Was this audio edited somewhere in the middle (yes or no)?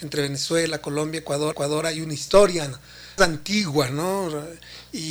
yes